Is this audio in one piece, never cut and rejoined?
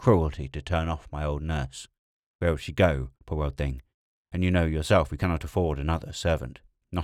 no; 1 cut; at 3.1 s

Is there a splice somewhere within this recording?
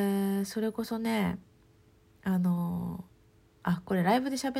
no; 0 cuts

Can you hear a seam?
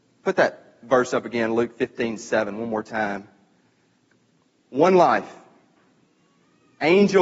no; 0 cuts

